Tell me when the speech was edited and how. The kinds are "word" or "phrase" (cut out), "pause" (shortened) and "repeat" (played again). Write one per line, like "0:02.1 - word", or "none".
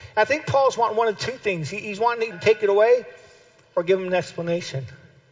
0:02.3 - phrase